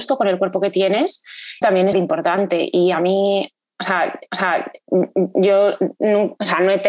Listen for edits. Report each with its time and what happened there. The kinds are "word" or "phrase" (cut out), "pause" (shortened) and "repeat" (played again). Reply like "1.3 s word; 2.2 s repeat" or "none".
1.6 s word; 1.9 s word; 4.3 s repeat